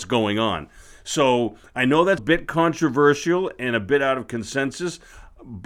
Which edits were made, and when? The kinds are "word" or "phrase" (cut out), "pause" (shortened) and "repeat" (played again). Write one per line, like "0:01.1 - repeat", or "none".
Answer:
0:02.2 - word